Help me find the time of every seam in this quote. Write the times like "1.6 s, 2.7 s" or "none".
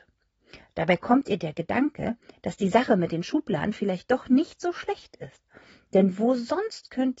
none